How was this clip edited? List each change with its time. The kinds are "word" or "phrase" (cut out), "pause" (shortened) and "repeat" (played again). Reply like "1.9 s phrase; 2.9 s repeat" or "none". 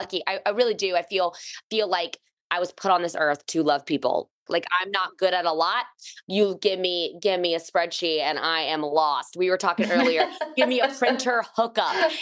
none